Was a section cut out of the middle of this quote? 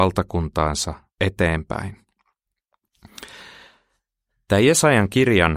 no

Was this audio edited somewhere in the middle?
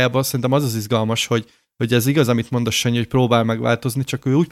no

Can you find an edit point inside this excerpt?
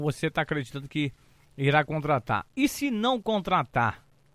no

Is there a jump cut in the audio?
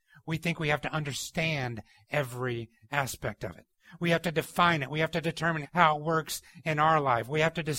yes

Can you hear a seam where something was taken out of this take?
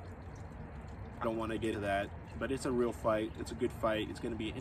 yes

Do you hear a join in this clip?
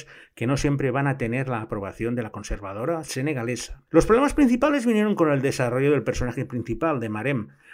yes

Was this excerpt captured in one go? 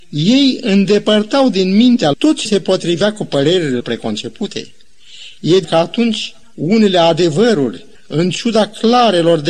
no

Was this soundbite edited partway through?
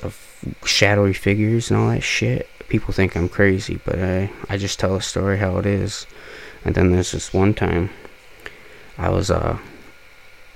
no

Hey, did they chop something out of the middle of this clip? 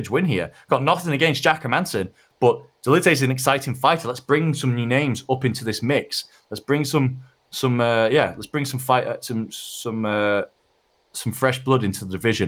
no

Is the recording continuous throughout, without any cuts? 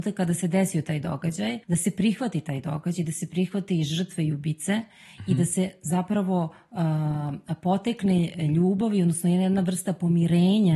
no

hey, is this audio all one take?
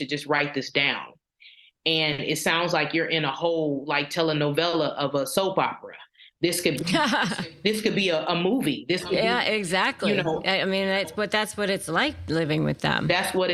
yes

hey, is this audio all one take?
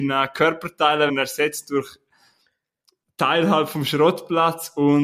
no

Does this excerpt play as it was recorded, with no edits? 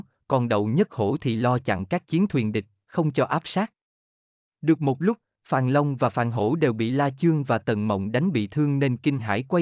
yes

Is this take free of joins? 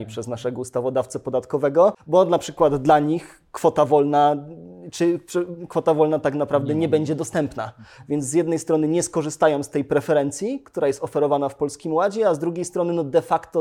yes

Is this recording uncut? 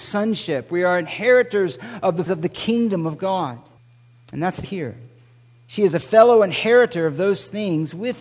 no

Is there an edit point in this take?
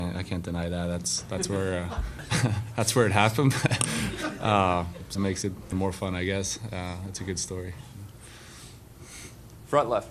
yes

